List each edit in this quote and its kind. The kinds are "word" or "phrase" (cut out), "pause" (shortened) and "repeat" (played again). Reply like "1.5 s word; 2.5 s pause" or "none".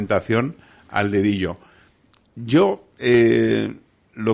none

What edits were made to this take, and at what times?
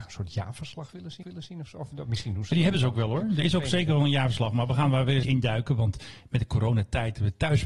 1.2 s repeat; 5.2 s word

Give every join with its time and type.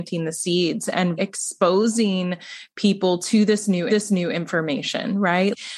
1.2 s word; 3.9 s repeat

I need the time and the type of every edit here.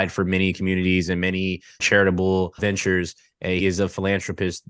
1.8 s word; 2.6 s word; 3.6 s word

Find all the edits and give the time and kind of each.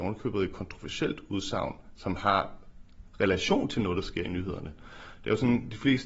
none

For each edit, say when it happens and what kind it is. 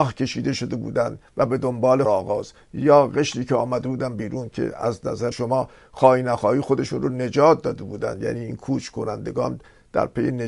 2.1 s phrase; 5.3 s word

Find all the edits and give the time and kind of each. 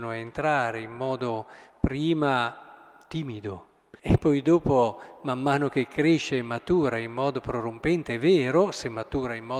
4.0 s pause

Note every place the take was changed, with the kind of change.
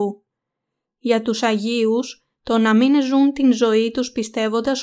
none

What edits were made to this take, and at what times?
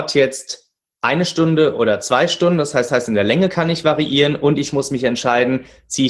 2.9 s repeat

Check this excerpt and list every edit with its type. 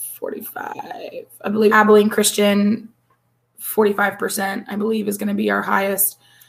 1.7 s word

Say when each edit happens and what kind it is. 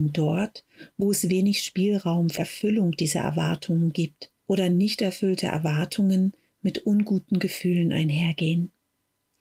2.4 s word; 4.4 s pause

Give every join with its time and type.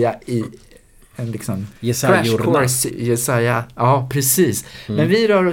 1.8 s pause; 2.9 s word

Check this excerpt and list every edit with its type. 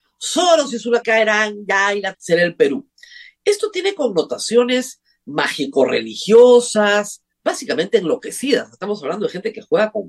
1.0 s word; 2.1 s phrase; 7.3 s pause

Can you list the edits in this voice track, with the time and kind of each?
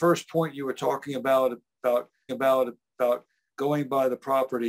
2.3 s repeat

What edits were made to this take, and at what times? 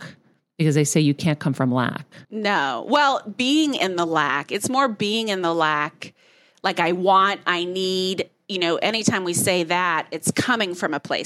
2.2 s pause

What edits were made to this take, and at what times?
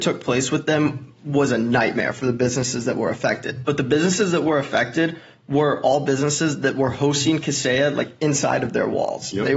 none

